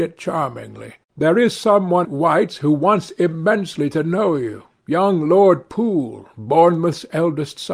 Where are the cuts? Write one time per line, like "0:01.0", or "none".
0:01.0
0:02.0